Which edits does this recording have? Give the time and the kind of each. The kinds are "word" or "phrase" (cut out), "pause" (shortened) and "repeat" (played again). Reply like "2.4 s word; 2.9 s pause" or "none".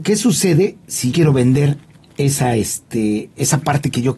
1.1 s word; 2.0 s pause